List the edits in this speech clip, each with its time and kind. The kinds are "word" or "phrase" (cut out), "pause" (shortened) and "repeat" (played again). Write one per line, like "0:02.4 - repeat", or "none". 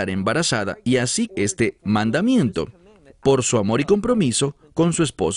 0:01.3 - word